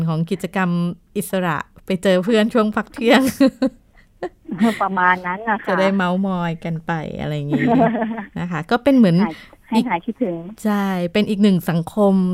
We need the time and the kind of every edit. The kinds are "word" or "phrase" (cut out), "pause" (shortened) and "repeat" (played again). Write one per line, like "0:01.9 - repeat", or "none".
none